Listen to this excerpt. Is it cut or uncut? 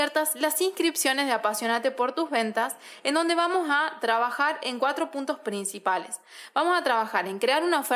uncut